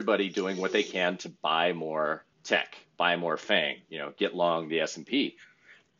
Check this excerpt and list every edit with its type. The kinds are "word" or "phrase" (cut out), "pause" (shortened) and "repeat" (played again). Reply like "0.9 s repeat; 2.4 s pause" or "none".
2.3 s pause; 3.8 s pause

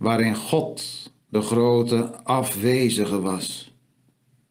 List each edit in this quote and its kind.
none

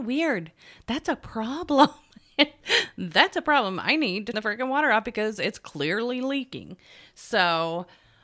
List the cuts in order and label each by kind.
4.3 s word

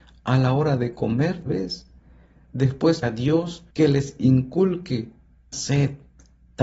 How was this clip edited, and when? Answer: 1.5 s word; 3.0 s word; 3.7 s pause; 5.5 s word

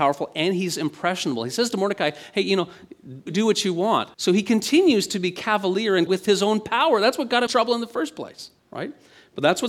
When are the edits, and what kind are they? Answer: 3.3 s word; 4.1 s pause; 6.1 s word; 7.5 s word; 8.6 s pause

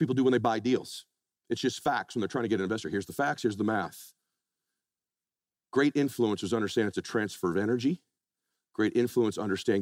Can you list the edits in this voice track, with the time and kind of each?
none

